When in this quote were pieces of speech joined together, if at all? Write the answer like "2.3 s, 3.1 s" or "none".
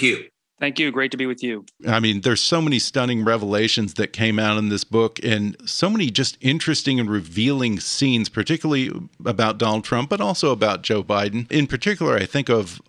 none